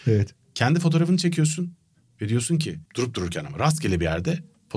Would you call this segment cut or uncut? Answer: cut